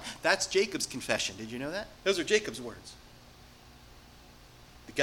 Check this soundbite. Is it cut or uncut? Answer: cut